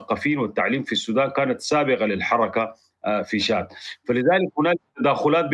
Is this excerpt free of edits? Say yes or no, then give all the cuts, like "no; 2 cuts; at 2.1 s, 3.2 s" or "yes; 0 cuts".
yes; 0 cuts